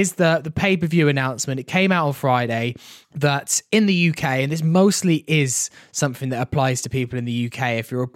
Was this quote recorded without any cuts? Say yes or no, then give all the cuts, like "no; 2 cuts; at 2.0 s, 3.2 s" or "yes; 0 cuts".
no; 1 cut; at 3.0 s